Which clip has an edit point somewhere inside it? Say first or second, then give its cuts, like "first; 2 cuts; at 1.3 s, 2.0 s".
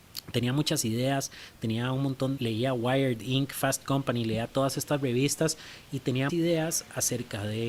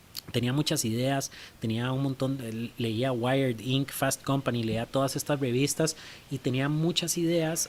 first; 2 cuts; at 2.4 s, 6.3 s